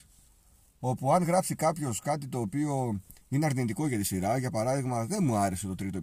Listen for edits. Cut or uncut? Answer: cut